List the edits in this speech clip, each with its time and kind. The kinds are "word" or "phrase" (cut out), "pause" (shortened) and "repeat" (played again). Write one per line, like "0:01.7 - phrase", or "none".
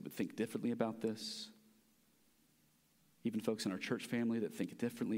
none